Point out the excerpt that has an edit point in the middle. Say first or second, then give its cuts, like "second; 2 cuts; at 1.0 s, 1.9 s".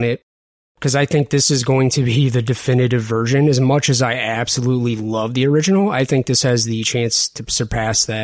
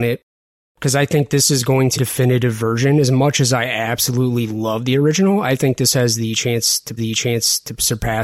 second; 2 cuts; at 1.9 s, 7.0 s